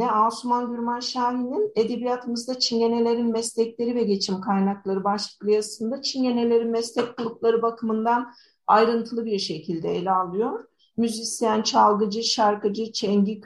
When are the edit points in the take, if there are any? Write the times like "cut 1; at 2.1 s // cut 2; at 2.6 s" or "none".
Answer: none